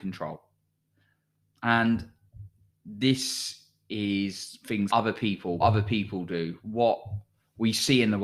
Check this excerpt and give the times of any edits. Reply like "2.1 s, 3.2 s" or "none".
4.9 s, 5.6 s